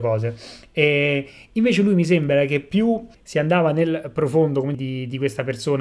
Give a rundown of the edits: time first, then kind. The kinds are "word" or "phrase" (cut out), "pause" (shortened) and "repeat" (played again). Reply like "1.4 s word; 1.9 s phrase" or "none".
3.1 s pause; 4.7 s phrase